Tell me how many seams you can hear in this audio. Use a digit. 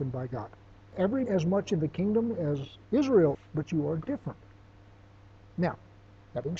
2